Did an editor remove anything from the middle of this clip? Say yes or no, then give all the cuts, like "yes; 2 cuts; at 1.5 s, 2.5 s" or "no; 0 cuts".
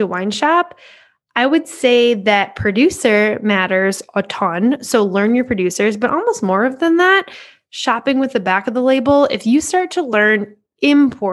no; 0 cuts